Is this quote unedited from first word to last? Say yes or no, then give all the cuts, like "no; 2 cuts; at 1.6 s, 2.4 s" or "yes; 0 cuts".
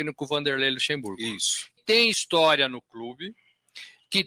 no; 1 cut; at 1.8 s